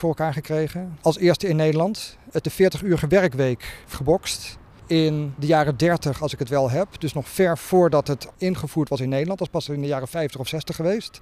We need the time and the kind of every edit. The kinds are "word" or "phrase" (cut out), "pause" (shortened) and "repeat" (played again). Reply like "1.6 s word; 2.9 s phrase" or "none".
2.4 s word; 3.9 s word; 8.3 s word